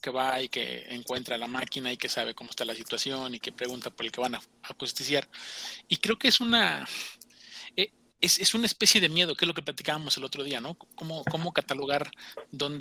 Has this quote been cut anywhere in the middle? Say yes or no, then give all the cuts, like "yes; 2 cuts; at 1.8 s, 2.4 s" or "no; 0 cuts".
no; 0 cuts